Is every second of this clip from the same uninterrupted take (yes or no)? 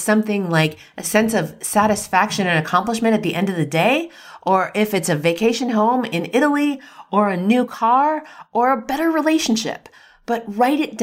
yes